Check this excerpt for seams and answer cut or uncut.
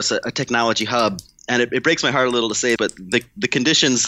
cut